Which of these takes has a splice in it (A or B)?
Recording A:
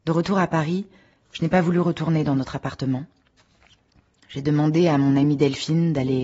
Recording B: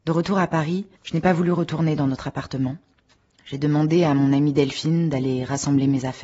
B